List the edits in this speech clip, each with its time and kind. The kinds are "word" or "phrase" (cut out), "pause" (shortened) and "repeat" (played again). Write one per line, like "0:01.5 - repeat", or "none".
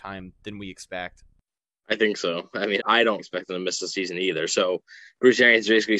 0:02.8 - word
0:03.2 - word